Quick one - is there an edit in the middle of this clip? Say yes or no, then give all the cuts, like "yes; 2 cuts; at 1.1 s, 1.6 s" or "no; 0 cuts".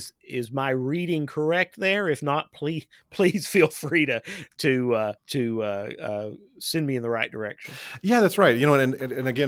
yes; 1 cut; at 5.2 s